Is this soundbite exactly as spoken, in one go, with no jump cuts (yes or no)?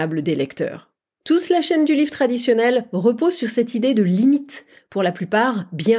yes